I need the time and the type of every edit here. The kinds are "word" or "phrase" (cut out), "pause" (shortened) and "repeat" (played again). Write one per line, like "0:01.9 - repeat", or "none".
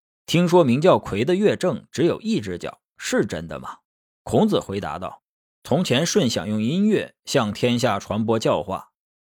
0:03.8 - pause